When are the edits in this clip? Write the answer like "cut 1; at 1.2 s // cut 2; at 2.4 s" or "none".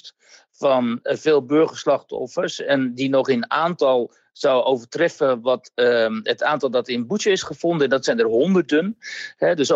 none

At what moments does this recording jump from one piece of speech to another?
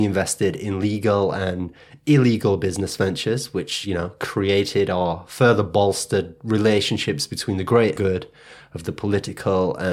cut 1; at 8.0 s

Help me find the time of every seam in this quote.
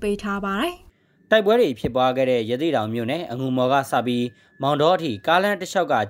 none

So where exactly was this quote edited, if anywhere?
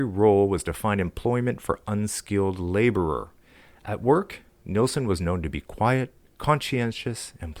none

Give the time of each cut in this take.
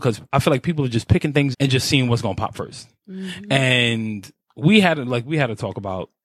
cut 1; at 1.5 s

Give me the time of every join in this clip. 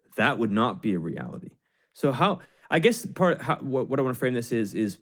none

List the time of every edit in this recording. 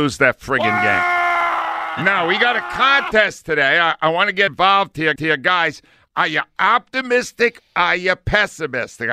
cut 1; at 4.5 s // cut 2; at 5.2 s

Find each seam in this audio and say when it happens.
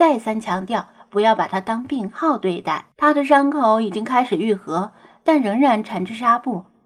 cut 1; at 2.9 s

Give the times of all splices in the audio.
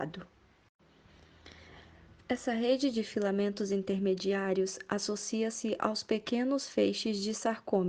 none

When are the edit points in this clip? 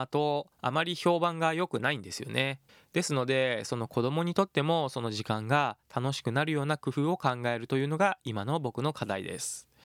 cut 1; at 2.7 s

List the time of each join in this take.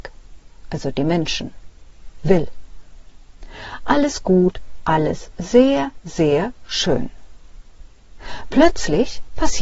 none

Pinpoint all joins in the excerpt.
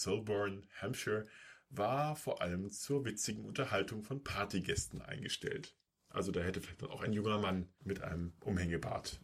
cut 1; at 5.9 s

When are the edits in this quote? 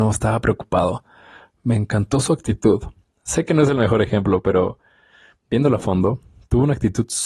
none

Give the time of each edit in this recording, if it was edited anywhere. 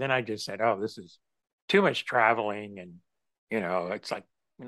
none

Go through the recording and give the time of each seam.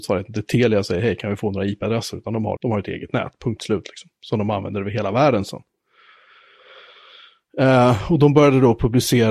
cut 1; at 2.6 s

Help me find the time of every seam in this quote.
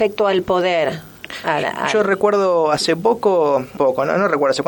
cut 1; at 3.8 s

